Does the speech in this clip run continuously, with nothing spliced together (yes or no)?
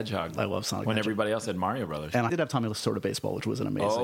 no